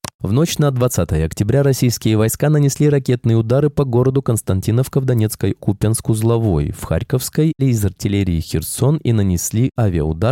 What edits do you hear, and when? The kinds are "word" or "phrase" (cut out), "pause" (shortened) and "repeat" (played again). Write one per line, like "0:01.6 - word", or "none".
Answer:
0:05.6 - phrase
0:07.6 - word